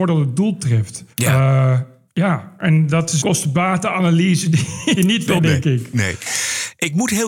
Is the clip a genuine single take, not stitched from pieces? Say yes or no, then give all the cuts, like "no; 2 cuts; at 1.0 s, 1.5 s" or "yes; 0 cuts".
no; 5 cuts; at 1.1 s, 2.1 s, 3.2 s, 5.0 s, 5.4 s